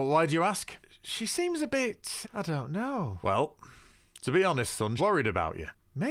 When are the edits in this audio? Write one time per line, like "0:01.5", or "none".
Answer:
0:02.2
0:05.0